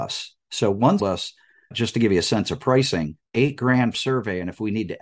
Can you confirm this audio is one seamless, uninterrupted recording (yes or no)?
no